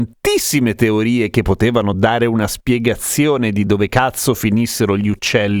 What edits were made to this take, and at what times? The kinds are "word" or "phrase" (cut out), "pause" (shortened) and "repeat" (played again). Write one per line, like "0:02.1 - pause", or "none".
none